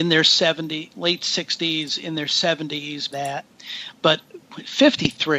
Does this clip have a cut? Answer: yes; 1 cut; at 3.1 s

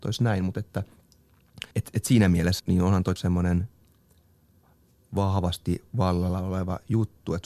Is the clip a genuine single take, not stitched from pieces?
no; 3 cuts; at 1.7 s, 2.6 s, 3.2 s

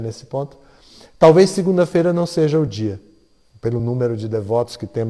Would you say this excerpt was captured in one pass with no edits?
yes; 0 cuts

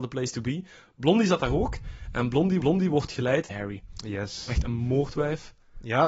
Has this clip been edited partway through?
yes; 2 cuts; at 2.6 s, 3.5 s

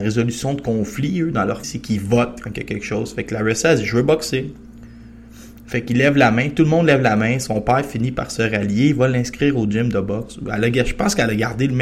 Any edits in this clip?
yes; 1 cut; at 1.6 s

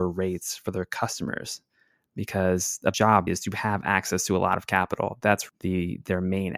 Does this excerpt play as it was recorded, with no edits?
no; 3 cuts; at 2.9 s, 3.3 s, 5.5 s

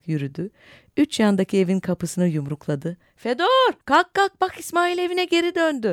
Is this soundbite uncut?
no; 1 cut; at 3.8 s

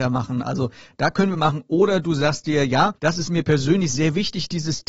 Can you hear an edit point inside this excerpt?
yes; 2 cuts; at 1.3 s, 3.0 s

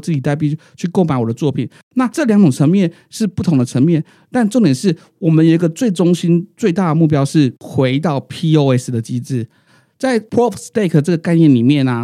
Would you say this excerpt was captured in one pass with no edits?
yes; 0 cuts

